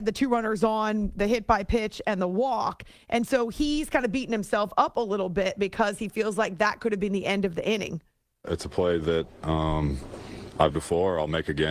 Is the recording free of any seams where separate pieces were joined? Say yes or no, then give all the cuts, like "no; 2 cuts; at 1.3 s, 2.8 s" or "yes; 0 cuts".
no; 1 cut; at 10.7 s